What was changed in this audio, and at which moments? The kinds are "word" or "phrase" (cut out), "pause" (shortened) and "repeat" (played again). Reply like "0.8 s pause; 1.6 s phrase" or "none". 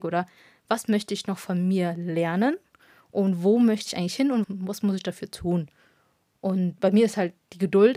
4.4 s word